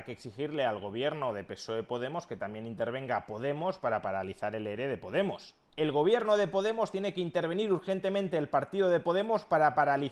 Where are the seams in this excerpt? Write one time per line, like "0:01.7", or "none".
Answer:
none